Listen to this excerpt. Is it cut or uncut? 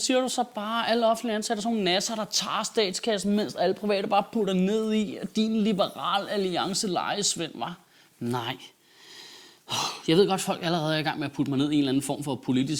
uncut